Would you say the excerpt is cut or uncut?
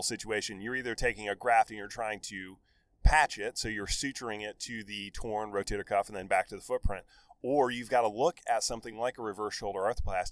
uncut